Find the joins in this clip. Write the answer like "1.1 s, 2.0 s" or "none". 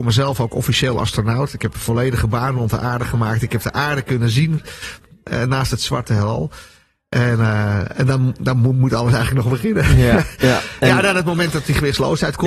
none